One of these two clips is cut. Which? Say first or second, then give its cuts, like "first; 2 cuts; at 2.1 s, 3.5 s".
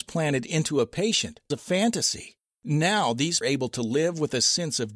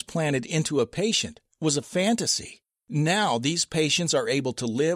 first; 2 cuts; at 1.5 s, 3.4 s